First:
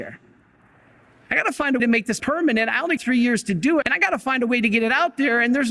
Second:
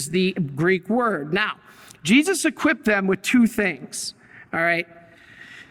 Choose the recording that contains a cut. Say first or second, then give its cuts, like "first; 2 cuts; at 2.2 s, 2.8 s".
first; 4 cuts; at 1.8 s, 2.2 s, 3.0 s, 3.8 s